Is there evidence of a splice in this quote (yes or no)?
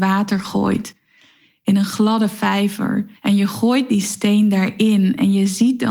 yes